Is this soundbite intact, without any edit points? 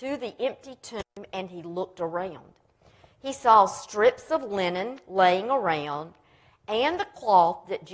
yes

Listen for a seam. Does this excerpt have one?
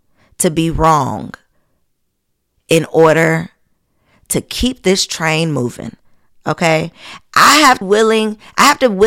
yes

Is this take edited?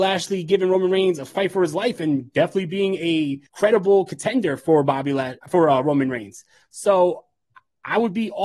yes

